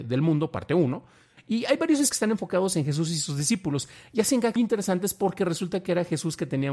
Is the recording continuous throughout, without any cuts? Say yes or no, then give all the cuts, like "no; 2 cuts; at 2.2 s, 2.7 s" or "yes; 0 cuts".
no; 2 cuts; at 2.1 s, 4.6 s